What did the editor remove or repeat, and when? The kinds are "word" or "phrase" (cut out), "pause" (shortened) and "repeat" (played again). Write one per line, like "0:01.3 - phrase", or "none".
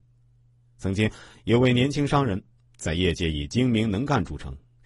none